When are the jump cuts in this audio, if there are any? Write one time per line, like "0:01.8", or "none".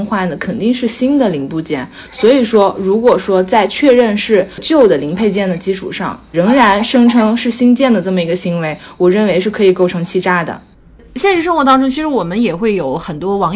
0:06.3